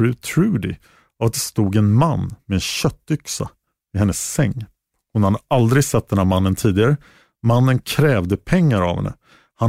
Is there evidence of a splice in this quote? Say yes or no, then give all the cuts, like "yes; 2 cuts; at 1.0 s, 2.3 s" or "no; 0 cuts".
no; 0 cuts